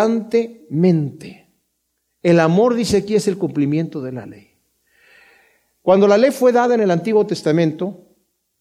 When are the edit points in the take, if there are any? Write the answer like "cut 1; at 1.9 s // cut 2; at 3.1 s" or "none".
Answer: none

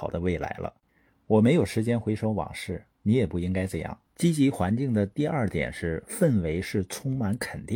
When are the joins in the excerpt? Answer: cut 1; at 4.1 s

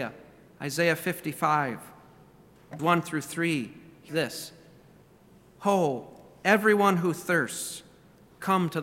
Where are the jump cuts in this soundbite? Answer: cut 1; at 2.8 s // cut 2; at 4.1 s

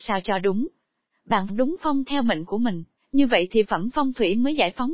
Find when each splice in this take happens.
cut 1; at 1.5 s // cut 2; at 2.1 s // cut 3; at 3.0 s // cut 4; at 3.6 s

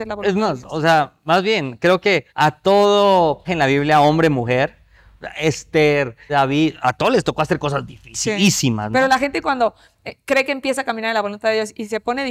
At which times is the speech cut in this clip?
cut 1; at 2.3 s // cut 2; at 3.4 s // cut 3; at 6.3 s

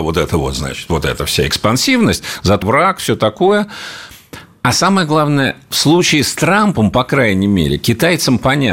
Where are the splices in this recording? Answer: cut 1; at 2.6 s

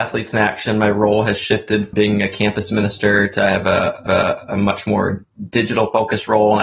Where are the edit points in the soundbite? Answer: cut 1; at 1.9 s // cut 2; at 4.1 s

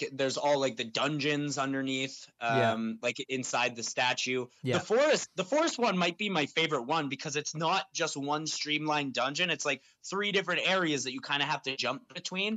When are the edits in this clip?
none

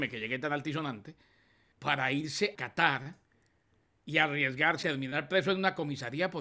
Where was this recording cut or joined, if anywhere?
cut 1; at 1.7 s // cut 2; at 2.5 s // cut 3; at 4.8 s

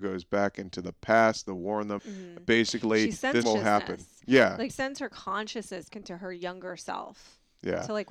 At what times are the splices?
cut 1; at 2.0 s // cut 2; at 3.4 s // cut 3; at 4.7 s // cut 4; at 5.9 s

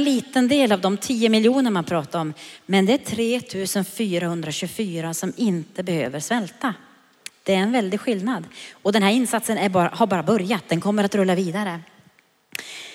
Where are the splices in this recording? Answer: none

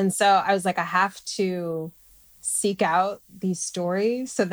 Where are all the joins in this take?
none

